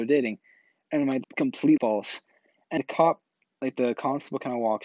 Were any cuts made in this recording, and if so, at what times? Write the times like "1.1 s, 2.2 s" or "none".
1.2 s, 1.8 s, 2.8 s